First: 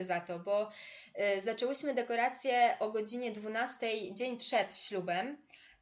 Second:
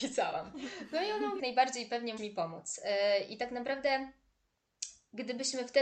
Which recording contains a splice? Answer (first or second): second